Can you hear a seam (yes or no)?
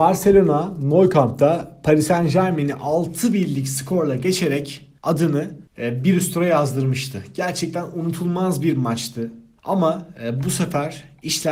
no